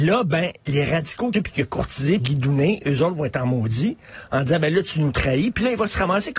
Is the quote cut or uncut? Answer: cut